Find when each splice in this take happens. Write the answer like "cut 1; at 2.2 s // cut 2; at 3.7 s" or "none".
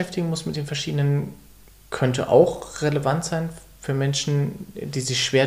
none